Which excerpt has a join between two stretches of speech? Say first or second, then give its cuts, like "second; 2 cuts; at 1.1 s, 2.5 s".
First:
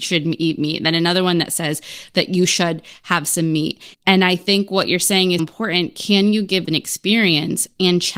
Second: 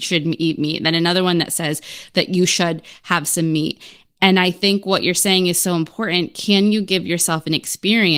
first; 3 cuts; at 3.9 s, 5.4 s, 6.6 s